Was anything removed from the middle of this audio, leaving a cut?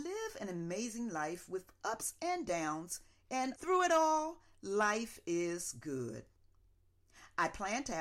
yes; 1 cut; at 3.5 s

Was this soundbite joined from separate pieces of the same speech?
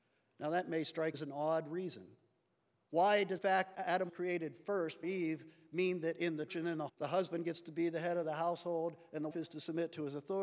yes; 8 cuts; at 1.1 s, 3.4 s, 3.7 s, 4.1 s, 5.0 s, 6.5 s, 6.9 s, 9.3 s

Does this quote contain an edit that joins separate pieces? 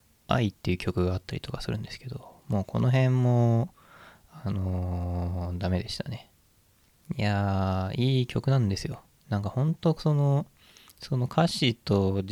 no; 0 cuts

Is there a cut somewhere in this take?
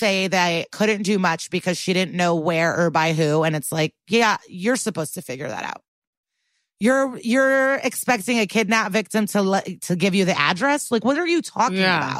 no; 0 cuts

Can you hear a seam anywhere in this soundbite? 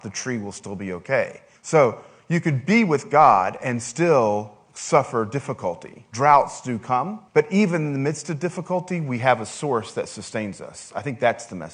yes; 2 cuts; at 1.6 s, 7.3 s

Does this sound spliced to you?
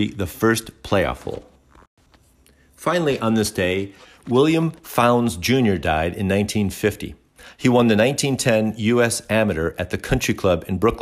no; 0 cuts

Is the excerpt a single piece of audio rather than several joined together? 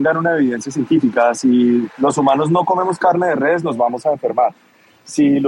yes; 0 cuts

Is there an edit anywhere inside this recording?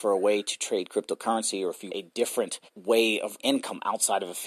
yes; 3 cuts; at 1.9 s, 2.7 s, 3.4 s

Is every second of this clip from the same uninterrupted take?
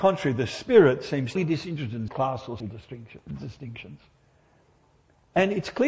no; 3 cuts; at 1.4 s, 2.1 s, 2.6 s

